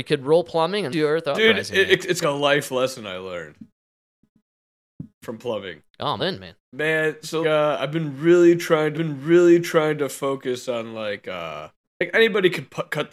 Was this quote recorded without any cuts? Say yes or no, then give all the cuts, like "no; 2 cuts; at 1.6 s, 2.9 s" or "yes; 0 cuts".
no; 8 cuts; at 0.9 s, 2.2 s, 5.1 s, 6.2 s, 6.6 s, 7.4 s, 8.9 s, 11.8 s